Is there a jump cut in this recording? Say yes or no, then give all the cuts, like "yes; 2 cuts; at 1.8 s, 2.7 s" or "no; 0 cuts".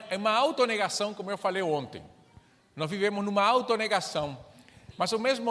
no; 0 cuts